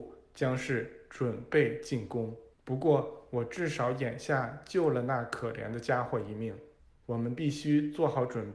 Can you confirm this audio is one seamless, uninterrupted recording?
no; 2 cuts; at 2.5 s, 6.8 s

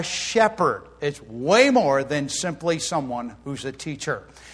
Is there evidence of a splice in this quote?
no; 0 cuts

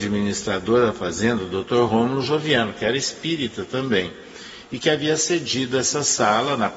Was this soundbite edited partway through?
no; 0 cuts

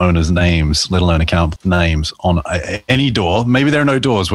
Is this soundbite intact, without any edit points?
no; 1 cut; at 1.6 s

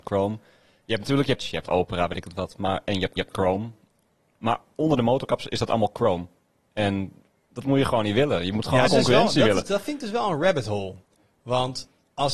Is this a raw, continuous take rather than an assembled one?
no; 4 cuts; at 1.4 s, 3.2 s, 7.3 s, 8.9 s

